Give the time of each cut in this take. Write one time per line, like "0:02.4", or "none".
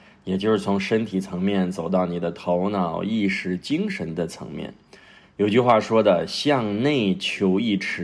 none